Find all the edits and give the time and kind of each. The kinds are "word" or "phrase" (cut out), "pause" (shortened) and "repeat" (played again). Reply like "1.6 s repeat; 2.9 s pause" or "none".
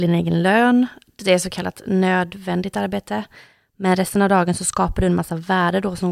none

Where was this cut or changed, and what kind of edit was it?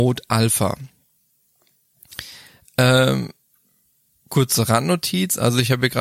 none

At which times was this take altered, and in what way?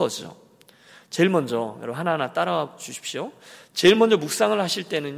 none

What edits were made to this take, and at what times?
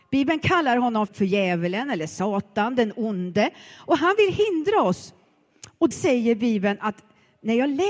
1.1 s word; 5.9 s word

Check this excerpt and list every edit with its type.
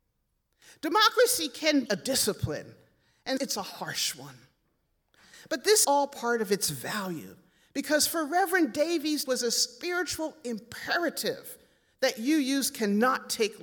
1.9 s word; 3.4 s word; 5.8 s word; 9.3 s word

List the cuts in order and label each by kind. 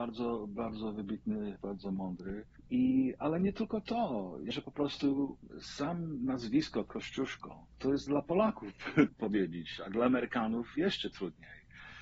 1.6 s word; 2.6 s pause; 4.5 s word; 7.7 s pause; 8.1 s word; 9.1 s word

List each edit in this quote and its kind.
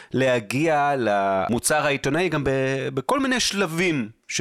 none

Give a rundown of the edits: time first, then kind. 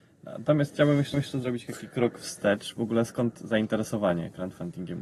1.1 s repeat

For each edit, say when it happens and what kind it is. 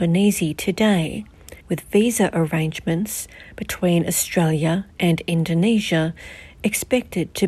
1.6 s pause

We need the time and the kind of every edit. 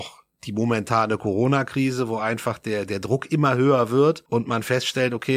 none

